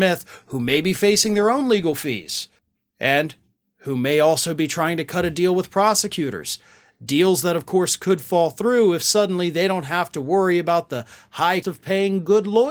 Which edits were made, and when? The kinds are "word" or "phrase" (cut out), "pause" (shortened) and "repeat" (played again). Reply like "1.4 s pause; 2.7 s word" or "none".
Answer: 2.6 s pause; 11.6 s word